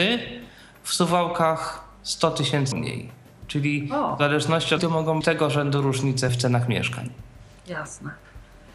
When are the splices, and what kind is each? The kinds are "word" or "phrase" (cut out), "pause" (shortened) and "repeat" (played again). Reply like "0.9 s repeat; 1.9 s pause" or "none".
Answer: 2.7 s word; 4.8 s word; 5.2 s word; 6.3 s word